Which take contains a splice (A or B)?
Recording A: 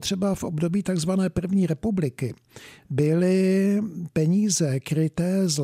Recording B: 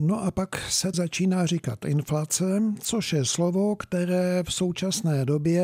B